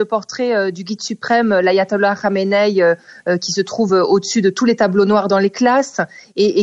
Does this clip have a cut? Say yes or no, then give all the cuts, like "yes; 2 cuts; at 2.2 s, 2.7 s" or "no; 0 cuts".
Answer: no; 0 cuts